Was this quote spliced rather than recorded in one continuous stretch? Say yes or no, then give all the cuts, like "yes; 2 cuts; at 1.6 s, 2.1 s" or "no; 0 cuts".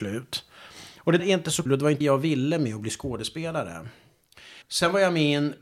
yes; 4 cuts; at 1.2 s, 1.7 s, 2.0 s, 4.6 s